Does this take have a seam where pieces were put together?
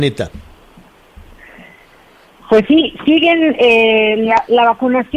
no; 0 cuts

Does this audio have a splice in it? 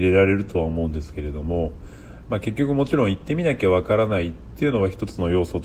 no; 0 cuts

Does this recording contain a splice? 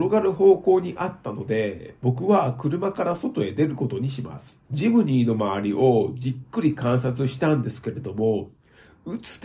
yes; 1 cut; at 4.7 s

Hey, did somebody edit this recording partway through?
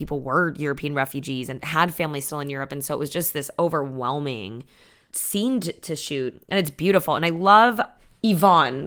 no; 0 cuts

